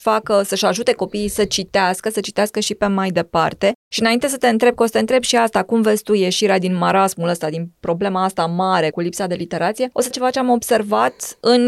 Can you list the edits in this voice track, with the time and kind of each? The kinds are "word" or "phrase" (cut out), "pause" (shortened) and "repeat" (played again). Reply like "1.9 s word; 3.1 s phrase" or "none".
3.8 s pause; 8.9 s word; 10.1 s phrase